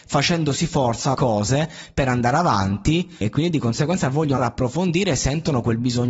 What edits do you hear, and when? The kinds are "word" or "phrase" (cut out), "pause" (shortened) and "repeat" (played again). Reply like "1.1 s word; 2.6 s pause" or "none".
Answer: 1.1 s word; 3.2 s word; 4.4 s word